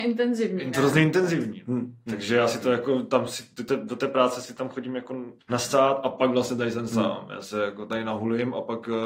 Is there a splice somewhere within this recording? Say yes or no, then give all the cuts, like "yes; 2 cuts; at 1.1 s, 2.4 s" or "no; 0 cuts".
yes; 1 cut; at 5.4 s